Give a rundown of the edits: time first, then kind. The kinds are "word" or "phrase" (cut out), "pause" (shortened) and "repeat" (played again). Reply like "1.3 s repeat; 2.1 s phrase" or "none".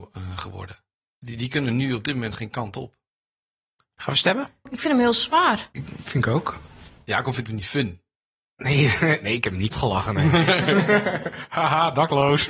9.7 s word